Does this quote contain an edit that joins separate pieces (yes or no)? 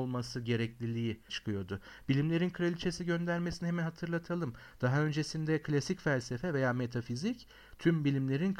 yes